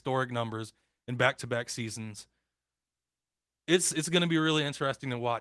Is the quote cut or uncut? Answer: uncut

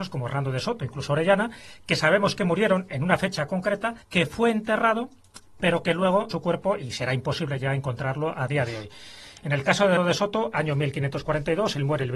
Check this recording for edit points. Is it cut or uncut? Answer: cut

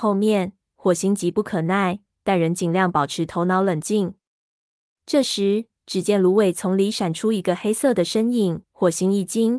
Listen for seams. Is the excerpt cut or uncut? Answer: cut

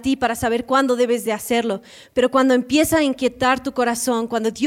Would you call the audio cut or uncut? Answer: uncut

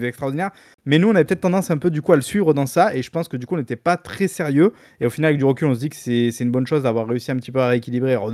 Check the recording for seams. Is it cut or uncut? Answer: uncut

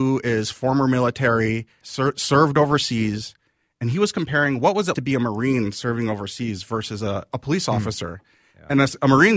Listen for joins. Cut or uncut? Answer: cut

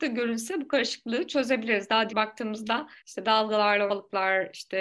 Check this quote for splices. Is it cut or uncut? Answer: cut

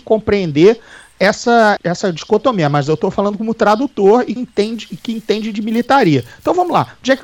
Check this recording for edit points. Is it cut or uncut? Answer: cut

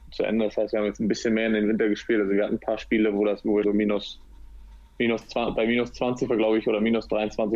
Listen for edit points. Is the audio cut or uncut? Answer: cut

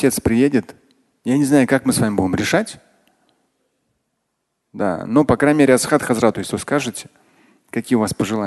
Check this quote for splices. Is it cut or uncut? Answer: cut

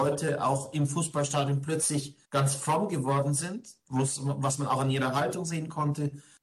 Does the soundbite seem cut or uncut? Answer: cut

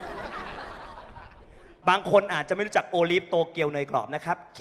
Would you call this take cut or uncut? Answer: uncut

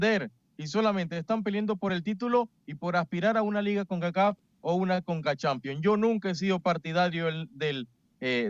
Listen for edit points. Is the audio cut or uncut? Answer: uncut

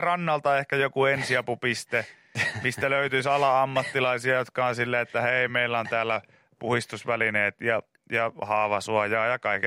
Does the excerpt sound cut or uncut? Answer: uncut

